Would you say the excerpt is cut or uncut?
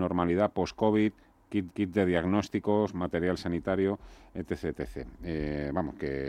cut